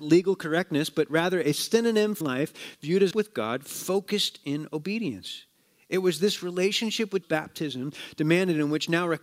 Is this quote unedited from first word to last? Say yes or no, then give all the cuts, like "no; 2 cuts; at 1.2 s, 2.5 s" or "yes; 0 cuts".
no; 3 cuts; at 2.2 s, 3.1 s, 7.2 s